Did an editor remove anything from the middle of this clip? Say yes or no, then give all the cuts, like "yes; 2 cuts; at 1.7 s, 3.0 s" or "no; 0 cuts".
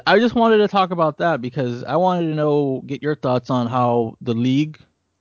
no; 0 cuts